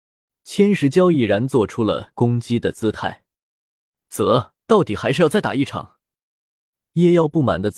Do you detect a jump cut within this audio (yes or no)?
yes